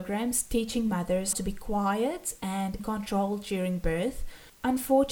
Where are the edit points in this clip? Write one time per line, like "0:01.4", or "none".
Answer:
0:01.3
0:02.8